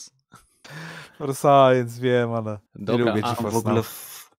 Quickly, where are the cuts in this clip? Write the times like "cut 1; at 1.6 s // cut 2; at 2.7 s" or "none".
cut 1; at 2.7 s